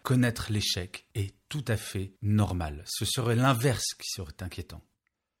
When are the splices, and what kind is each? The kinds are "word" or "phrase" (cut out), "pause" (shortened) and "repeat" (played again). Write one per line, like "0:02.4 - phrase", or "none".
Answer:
0:02.2 - pause